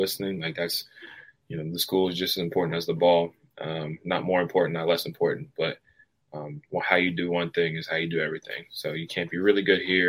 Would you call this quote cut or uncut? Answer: uncut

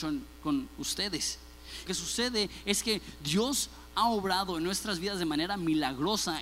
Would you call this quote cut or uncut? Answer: cut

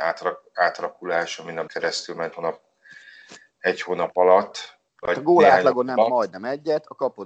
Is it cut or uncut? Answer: cut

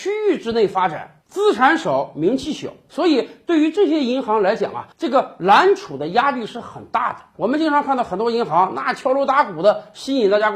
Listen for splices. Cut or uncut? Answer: cut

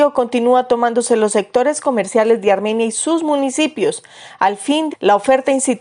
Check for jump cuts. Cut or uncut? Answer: cut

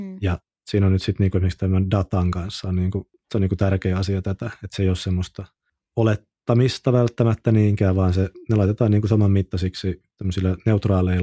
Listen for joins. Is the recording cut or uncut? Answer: uncut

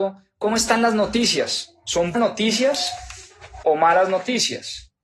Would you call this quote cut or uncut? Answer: cut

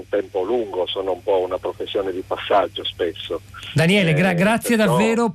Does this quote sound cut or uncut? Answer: uncut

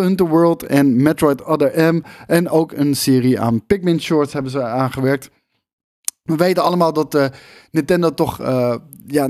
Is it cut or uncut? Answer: uncut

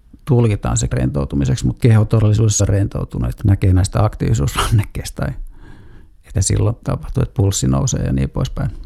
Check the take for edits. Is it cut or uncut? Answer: cut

